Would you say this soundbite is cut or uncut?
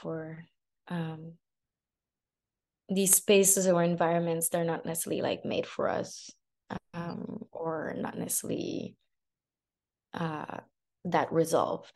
uncut